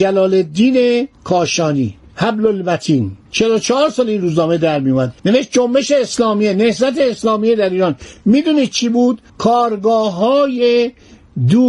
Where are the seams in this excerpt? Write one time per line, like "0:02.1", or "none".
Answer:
0:03.2
0:05.2
0:09.3